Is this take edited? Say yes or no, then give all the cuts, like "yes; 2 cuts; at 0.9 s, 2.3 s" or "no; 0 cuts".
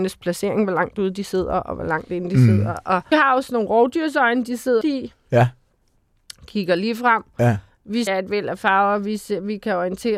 yes; 3 cuts; at 3.1 s, 4.8 s, 8.1 s